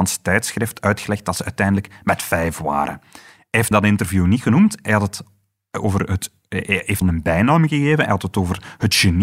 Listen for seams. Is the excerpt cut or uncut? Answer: cut